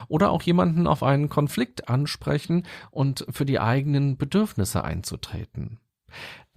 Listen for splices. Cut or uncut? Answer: uncut